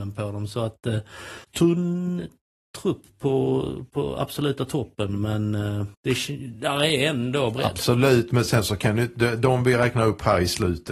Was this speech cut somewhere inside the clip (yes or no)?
yes